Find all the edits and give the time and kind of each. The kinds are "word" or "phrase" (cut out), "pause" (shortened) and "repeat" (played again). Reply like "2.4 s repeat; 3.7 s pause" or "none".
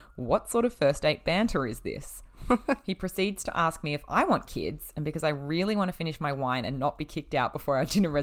none